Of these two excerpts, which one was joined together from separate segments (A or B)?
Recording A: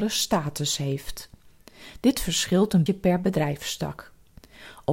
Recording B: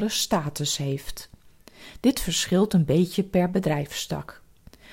A